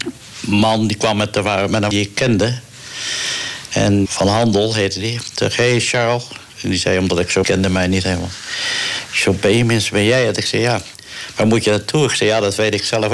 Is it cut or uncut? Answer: cut